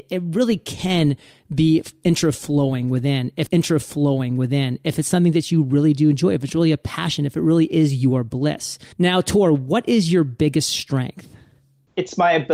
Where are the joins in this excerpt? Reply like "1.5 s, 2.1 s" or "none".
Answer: 3.5 s, 8.9 s